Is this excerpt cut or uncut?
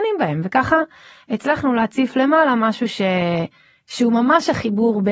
uncut